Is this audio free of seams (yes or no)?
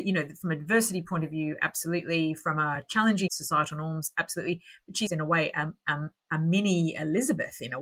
no